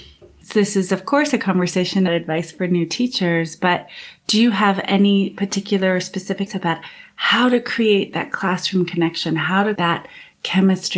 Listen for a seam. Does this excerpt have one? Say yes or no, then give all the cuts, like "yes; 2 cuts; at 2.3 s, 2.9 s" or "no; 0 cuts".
yes; 3 cuts; at 2.1 s, 6.5 s, 9.8 s